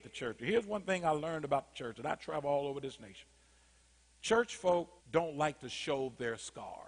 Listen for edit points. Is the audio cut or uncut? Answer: cut